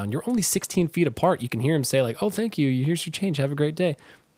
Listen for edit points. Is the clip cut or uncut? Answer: uncut